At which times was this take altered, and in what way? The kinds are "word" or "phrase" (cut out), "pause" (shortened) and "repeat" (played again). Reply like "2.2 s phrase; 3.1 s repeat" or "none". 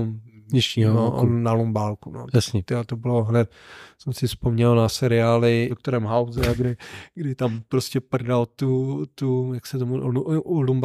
none

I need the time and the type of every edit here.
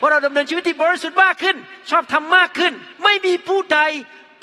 2.9 s pause

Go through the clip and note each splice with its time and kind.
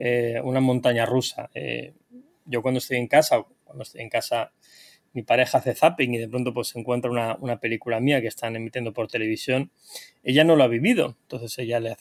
none

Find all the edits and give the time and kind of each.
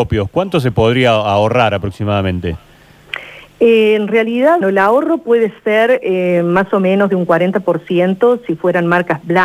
4.6 s word

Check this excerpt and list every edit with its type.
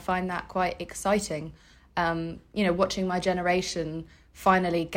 none

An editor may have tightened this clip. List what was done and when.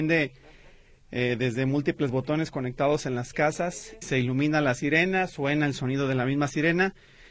4.0 s word

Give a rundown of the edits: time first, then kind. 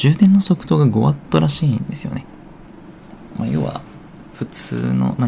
none

